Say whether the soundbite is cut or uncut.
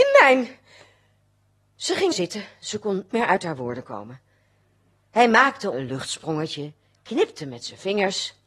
cut